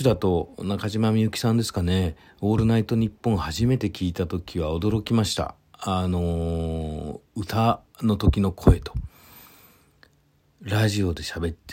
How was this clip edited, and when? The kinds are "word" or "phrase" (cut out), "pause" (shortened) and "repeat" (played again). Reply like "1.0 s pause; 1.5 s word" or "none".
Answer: 2.3 s pause